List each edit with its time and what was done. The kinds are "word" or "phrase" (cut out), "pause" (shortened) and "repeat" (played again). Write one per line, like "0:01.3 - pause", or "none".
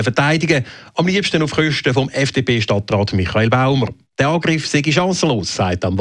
none